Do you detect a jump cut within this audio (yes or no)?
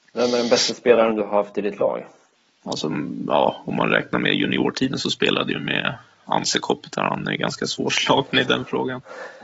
no